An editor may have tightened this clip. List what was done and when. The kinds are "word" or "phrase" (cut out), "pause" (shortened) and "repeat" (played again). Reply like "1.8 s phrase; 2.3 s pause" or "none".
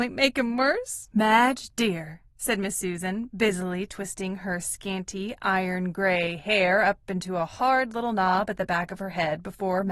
1.1 s pause; 2.3 s pause